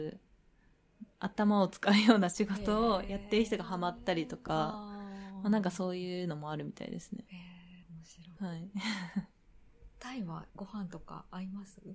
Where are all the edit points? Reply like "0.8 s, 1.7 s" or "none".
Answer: 1.1 s, 7.8 s, 8.4 s, 10.5 s